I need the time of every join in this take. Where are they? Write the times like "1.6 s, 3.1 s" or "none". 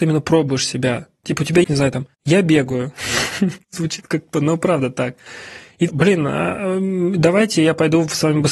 1.6 s, 2.1 s, 3.6 s, 4.3 s, 5.9 s